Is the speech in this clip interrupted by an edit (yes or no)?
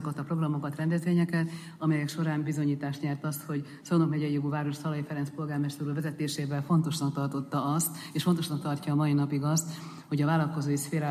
no